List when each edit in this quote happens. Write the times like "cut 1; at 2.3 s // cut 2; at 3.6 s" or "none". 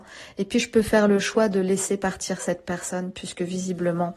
none